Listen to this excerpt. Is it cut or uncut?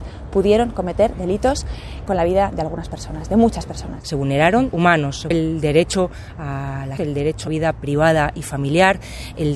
cut